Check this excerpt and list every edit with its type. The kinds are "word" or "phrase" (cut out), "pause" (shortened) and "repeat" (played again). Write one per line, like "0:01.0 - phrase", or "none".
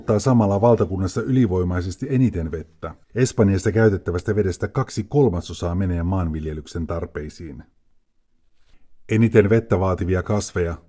0:03.0 - pause